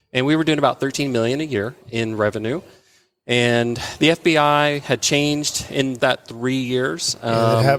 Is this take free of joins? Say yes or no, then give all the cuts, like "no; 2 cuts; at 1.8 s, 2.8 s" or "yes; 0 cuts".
no; 1 cut; at 6.0 s